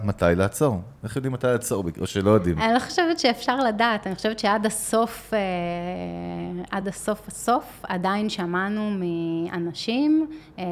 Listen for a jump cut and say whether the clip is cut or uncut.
uncut